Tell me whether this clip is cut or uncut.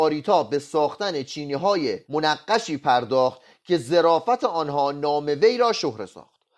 cut